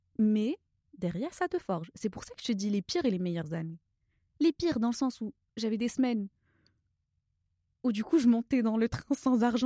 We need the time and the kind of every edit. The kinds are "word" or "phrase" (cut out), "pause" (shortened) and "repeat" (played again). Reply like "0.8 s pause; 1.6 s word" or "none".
none